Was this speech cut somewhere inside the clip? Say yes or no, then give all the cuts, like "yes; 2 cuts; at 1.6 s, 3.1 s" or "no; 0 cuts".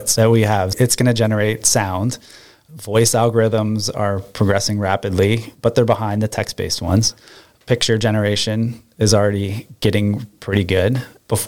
no; 0 cuts